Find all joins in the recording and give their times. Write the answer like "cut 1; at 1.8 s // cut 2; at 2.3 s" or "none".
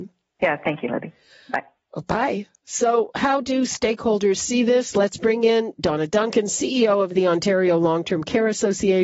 none